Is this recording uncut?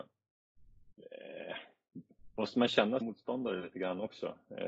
no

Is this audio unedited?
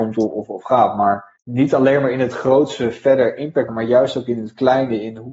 no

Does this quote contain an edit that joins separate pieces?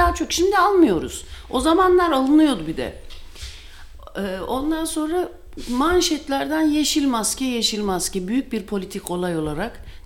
no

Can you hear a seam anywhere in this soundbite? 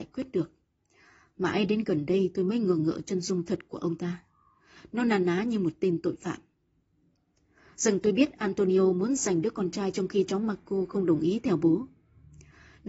no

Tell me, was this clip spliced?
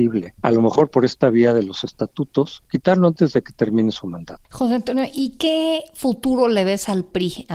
yes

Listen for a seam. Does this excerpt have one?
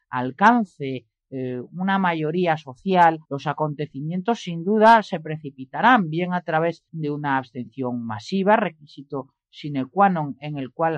yes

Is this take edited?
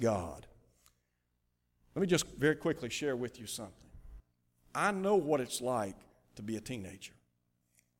no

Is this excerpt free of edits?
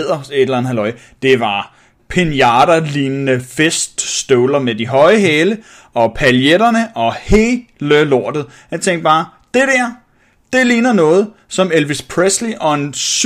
no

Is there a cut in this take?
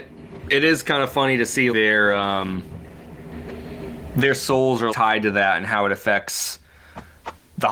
yes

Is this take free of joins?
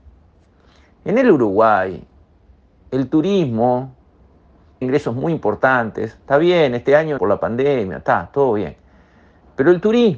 no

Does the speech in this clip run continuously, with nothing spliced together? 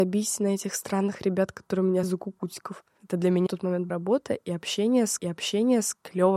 no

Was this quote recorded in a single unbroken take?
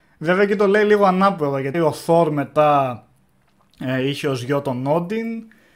no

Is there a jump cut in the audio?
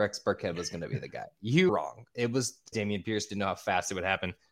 yes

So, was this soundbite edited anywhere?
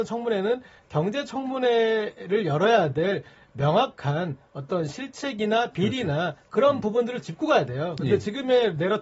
no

